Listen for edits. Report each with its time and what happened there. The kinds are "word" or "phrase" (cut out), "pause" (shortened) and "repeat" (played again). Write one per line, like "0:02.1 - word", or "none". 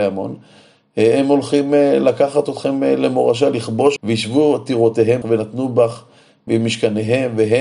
0:04.0 - word
0:05.2 - word